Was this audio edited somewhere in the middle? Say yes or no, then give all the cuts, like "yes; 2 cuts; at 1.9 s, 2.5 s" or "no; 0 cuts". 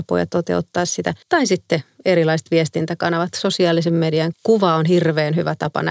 yes; 2 cuts; at 1.2 s, 4.3 s